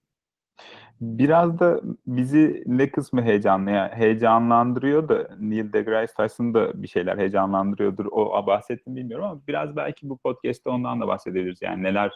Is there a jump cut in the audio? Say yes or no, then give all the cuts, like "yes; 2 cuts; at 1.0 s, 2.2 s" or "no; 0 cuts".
no; 0 cuts